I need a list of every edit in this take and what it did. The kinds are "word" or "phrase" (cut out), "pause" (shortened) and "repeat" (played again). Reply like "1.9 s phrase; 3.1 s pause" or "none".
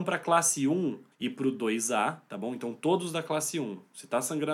1.1 s pause